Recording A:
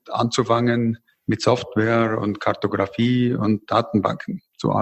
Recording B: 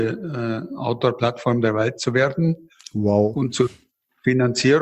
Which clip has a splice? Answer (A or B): A